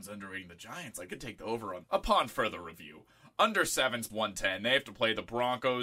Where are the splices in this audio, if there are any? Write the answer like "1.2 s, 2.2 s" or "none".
1.1 s, 1.8 s, 4.1 s